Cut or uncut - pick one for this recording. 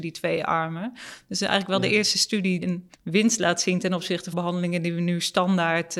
cut